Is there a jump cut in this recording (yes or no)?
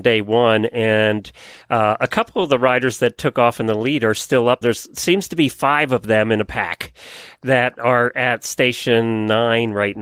yes